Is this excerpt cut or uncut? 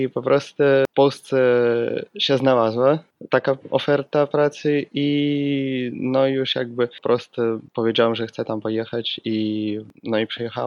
cut